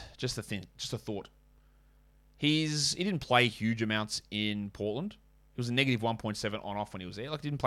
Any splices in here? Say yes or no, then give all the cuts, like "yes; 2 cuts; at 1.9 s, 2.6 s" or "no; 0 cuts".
no; 0 cuts